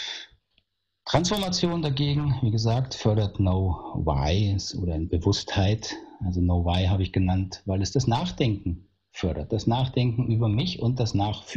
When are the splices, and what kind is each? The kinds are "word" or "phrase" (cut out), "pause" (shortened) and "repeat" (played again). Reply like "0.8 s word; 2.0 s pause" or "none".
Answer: 5.1 s word